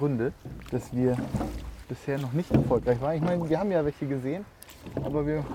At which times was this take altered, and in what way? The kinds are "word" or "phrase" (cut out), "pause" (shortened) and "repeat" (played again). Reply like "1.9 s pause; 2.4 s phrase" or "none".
none